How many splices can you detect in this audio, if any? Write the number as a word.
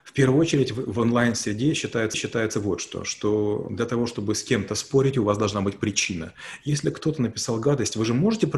one